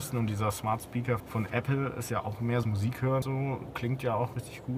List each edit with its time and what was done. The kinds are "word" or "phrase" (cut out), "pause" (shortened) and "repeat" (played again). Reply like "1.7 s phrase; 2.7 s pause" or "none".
1.2 s word; 2.6 s phrase; 3.2 s word